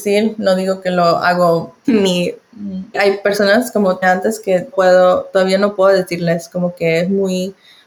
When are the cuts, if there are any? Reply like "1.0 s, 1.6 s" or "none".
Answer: 1.8 s, 2.9 s, 4.0 s, 4.7 s